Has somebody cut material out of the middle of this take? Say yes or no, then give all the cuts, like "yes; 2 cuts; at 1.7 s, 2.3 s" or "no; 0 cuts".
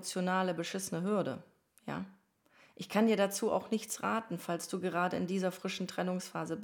no; 0 cuts